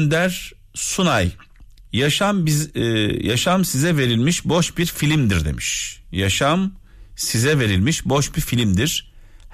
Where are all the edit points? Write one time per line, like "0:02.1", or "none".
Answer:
none